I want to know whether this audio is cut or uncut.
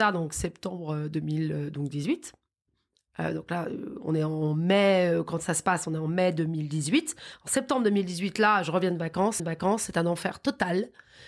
cut